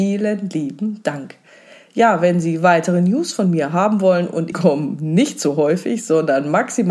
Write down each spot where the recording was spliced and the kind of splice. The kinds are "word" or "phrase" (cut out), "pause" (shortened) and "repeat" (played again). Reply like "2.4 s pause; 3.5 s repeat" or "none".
4.5 s phrase

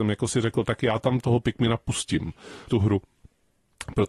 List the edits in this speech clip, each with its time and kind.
1.2 s word; 2.7 s word

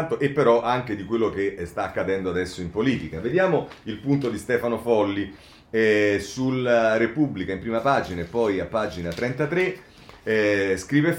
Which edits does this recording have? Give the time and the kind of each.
none

